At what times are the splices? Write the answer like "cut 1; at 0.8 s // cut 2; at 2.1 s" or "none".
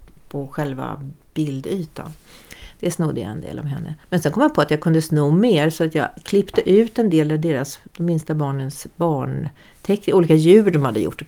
cut 1; at 4.0 s // cut 2; at 7.9 s